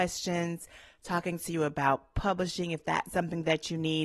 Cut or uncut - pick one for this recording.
cut